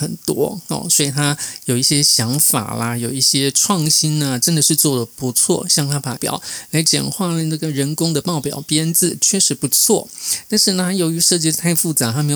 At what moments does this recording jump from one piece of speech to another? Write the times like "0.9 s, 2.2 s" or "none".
6.2 s